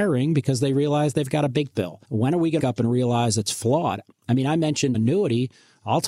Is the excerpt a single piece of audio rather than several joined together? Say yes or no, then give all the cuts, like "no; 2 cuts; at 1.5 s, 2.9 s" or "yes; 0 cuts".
no; 4 cuts; at 1.7 s, 2.0 s, 2.6 s, 4.9 s